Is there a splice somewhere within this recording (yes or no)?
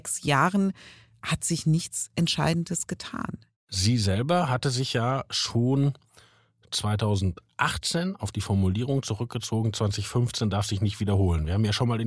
no